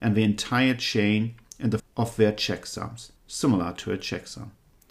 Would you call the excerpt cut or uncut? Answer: cut